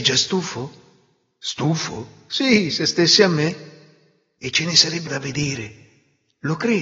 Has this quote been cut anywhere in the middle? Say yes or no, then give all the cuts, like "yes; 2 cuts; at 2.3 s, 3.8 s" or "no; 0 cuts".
yes; 1 cut; at 5.1 s